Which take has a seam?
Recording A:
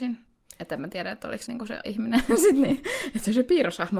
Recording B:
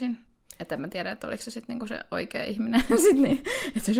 A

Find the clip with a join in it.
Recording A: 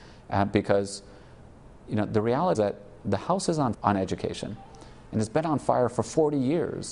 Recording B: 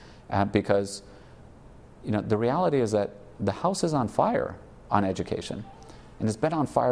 A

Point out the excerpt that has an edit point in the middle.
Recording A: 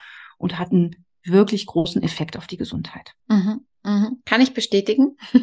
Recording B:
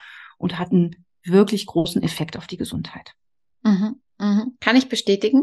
A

